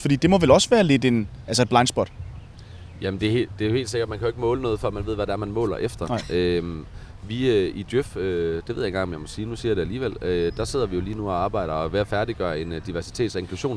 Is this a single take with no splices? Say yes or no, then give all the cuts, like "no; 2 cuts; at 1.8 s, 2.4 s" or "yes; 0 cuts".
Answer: yes; 0 cuts